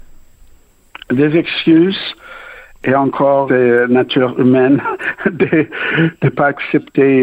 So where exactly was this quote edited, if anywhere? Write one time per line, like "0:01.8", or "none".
0:03.5